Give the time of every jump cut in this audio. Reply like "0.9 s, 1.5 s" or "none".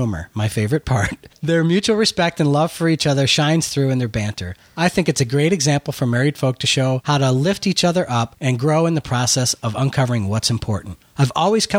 1.4 s